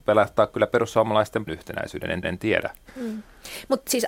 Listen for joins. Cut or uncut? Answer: cut